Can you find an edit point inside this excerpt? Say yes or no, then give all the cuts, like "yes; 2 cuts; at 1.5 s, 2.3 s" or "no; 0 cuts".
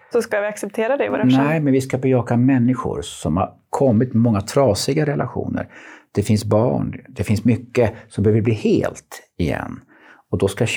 no; 0 cuts